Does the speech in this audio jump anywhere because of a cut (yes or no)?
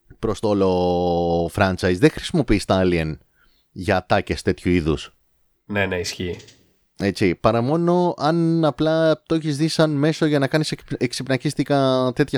no